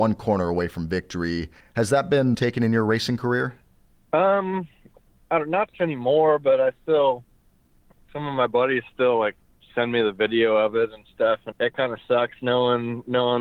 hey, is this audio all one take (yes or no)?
no